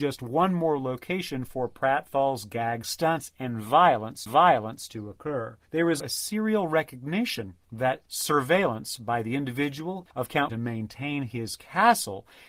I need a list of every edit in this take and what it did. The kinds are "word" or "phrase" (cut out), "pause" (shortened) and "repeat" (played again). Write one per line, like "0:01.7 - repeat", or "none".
0:04.3 - repeat
0:05.6 - pause
0:06.0 - word
0:10.5 - phrase